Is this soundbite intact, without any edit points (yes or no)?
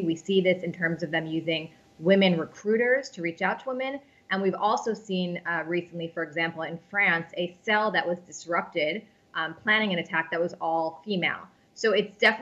yes